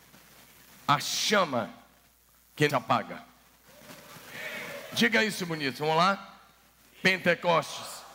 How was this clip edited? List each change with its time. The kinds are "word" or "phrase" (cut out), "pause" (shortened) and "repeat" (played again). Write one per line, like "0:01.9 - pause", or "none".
0:02.7 - phrase
0:05.5 - word

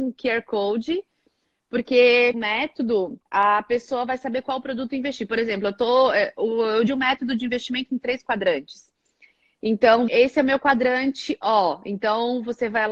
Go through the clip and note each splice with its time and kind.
0:02.3 - phrase
0:03.2 - pause
0:06.9 - word
0:10.1 - word

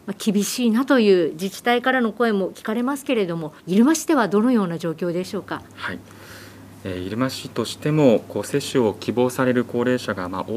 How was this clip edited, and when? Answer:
0:03.6 - pause
0:05.7 - pause

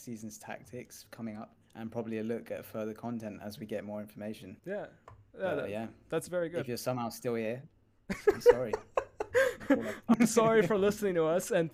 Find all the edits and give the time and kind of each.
0:01.6 - pause
0:04.6 - pause

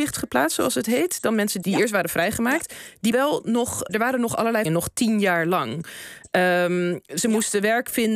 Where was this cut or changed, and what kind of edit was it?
0:01.6 - word
0:03.1 - word
0:03.9 - word
0:04.7 - word

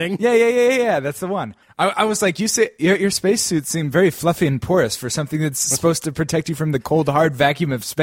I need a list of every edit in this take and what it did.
0:01.6 - pause

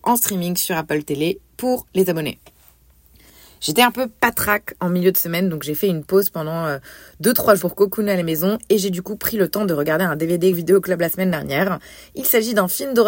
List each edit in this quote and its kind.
0:07.6 - word
0:10.5 - phrase

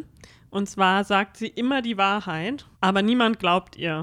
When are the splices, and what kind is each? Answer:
0:02.7 - pause

